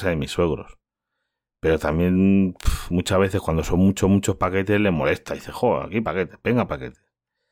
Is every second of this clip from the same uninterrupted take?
yes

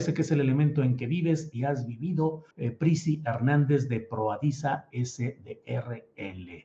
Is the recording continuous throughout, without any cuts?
no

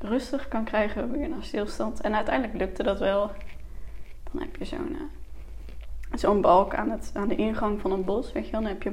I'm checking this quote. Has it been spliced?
no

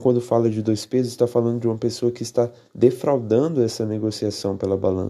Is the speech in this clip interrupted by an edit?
no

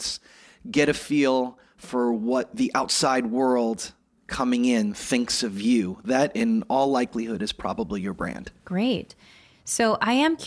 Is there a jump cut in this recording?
no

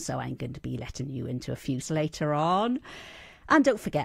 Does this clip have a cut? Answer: yes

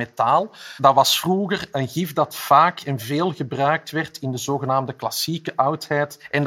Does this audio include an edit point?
no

